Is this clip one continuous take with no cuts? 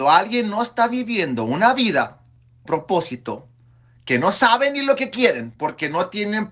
no; 1 cut; at 2.7 s

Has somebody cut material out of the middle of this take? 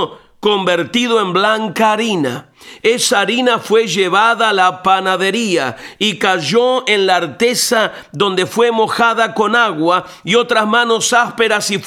no; 0 cuts

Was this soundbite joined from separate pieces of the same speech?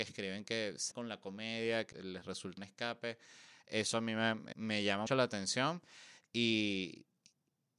yes; 5 cuts; at 0.9 s, 1.9 s, 2.6 s, 4.5 s, 5.1 s

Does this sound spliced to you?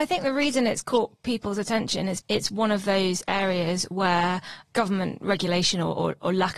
yes; 1 cut; at 2.2 s

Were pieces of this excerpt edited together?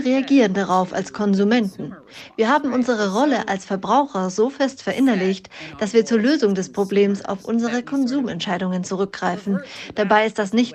no; 0 cuts

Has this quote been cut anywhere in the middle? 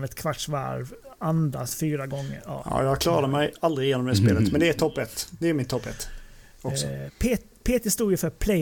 no; 0 cuts

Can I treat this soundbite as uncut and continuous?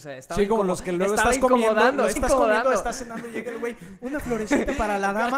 no; 1 cut; at 2.2 s

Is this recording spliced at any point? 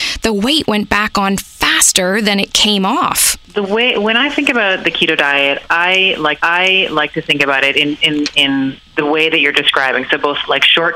yes; 1 cut; at 6.4 s

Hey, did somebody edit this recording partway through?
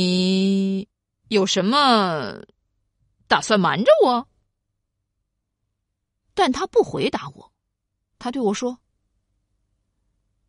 no; 0 cuts

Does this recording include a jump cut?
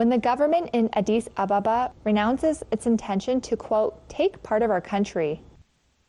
no; 0 cuts

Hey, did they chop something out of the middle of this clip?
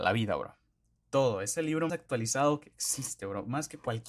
yes; 1 cut; at 1.9 s

